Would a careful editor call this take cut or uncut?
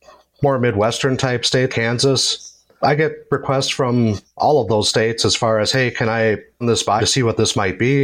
cut